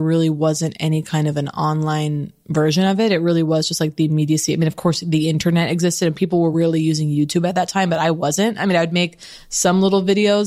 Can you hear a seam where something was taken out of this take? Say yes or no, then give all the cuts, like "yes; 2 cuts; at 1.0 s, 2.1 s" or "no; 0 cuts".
no; 0 cuts